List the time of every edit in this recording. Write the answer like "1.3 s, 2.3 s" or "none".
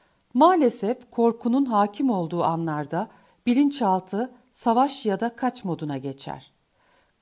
none

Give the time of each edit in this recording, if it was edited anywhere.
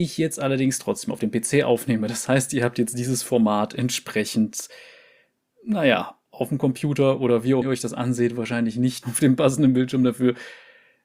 7.6 s, 9.0 s

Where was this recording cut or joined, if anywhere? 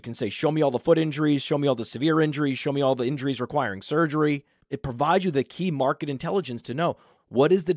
none

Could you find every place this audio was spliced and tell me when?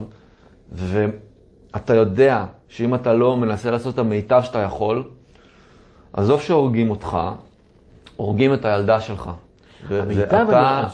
none

